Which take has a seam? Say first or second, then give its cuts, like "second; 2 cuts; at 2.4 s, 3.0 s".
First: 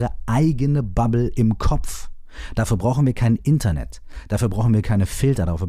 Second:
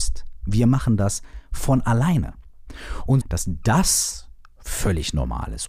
second; 1 cut; at 3.2 s